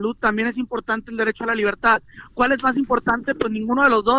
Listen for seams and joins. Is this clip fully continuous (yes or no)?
yes